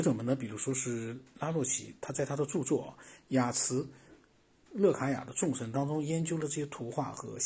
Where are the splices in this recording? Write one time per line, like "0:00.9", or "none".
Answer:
none

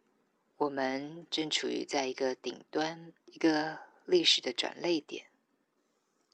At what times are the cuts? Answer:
0:03.2

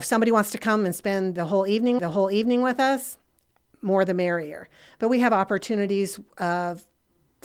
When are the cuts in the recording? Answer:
0:02.0

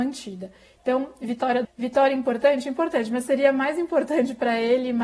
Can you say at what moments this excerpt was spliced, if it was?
0:01.6

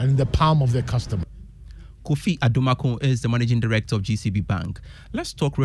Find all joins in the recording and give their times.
none

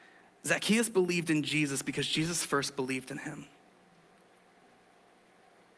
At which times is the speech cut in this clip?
none

